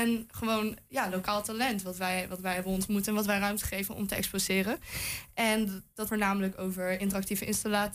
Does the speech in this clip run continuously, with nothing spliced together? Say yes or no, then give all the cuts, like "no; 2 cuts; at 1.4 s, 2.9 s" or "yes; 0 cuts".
no; 1 cut; at 6.1 s